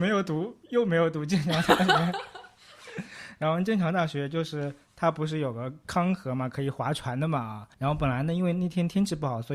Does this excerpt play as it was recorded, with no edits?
no; 1 cut; at 7.7 s

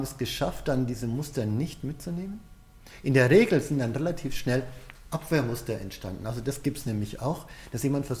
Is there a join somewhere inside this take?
no; 0 cuts

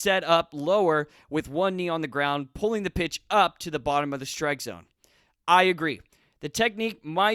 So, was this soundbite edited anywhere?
no; 0 cuts

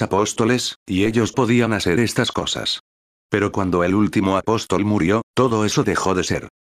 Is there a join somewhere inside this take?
no; 0 cuts

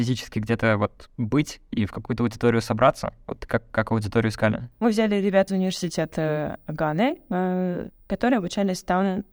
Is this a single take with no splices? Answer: no; 3 cuts; at 1.1 s, 5.5 s, 8.0 s

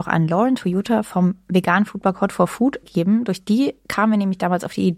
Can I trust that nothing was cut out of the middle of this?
no; 1 cut; at 2.8 s

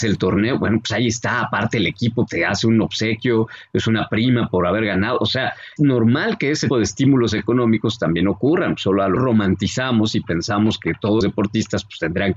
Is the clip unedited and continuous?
no; 5 cuts; at 2.3 s, 5.8 s, 6.7 s, 9.2 s, 11.2 s

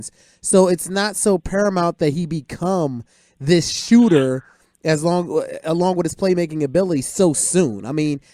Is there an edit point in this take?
no; 0 cuts

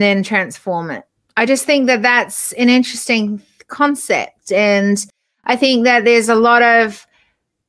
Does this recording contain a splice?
no; 0 cuts

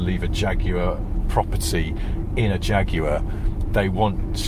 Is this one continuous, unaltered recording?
yes; 0 cuts

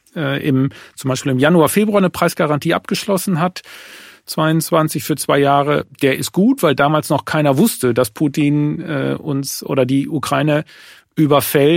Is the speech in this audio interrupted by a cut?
no; 0 cuts

